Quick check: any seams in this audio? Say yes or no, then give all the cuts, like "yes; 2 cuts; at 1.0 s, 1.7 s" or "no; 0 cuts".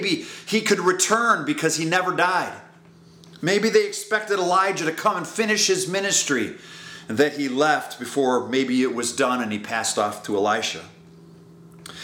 no; 0 cuts